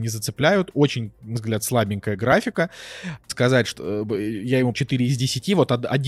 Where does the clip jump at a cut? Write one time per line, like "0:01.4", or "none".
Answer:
0:01.4
0:03.3
0:03.7
0:04.7